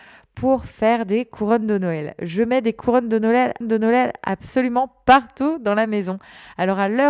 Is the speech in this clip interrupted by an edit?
yes; 1 cut; at 3.6 s

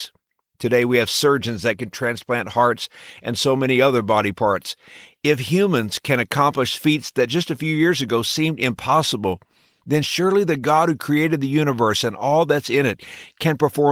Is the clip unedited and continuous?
yes; 0 cuts

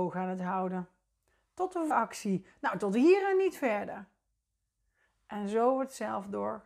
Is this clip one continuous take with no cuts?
no; 1 cut; at 1.9 s

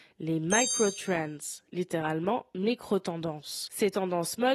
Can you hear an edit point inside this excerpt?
no; 0 cuts

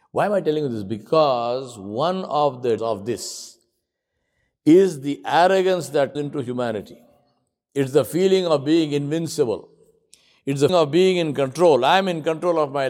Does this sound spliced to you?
yes; 3 cuts; at 2.8 s, 6.2 s, 10.7 s

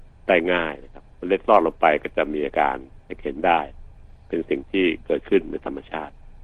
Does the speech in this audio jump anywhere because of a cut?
yes; 1 cut; at 1.1 s

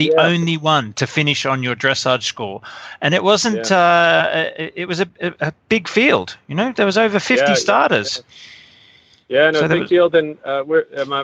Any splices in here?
yes; 1 cut; at 5.4 s

